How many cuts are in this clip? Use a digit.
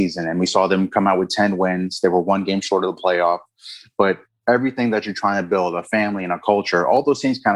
0